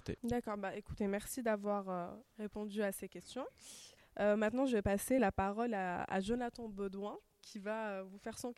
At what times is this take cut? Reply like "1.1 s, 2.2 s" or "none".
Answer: none